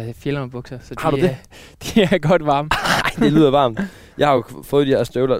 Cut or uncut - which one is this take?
uncut